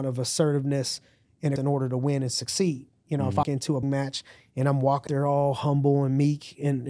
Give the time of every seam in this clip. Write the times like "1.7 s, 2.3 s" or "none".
1.6 s, 3.4 s, 3.8 s, 5.1 s